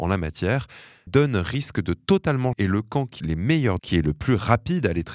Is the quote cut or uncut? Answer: cut